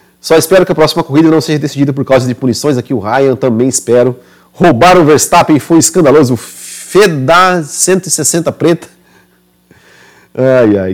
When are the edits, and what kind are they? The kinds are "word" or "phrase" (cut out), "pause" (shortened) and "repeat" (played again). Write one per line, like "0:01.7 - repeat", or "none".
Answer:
none